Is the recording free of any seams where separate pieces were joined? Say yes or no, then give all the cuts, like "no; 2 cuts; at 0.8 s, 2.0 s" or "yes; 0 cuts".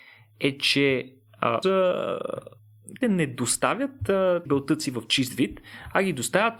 no; 3 cuts; at 1.6 s, 3.0 s, 4.5 s